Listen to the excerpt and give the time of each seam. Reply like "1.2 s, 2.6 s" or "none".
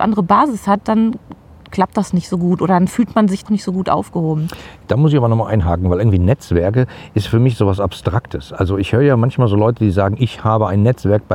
3.5 s

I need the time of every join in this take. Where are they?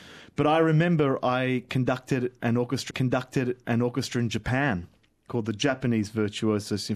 2.9 s

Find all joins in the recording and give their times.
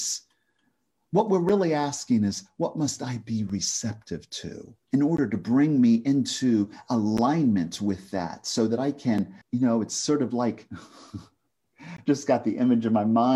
4.8 s, 9.4 s

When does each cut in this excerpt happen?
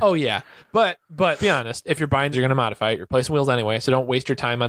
1.4 s, 2.3 s

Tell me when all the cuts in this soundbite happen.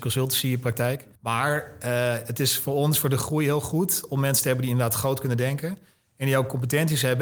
1.1 s

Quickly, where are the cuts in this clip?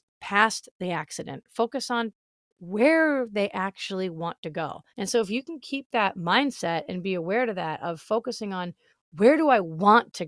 4.9 s

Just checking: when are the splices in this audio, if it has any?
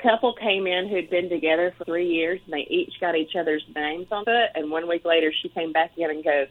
1.8 s, 4.2 s

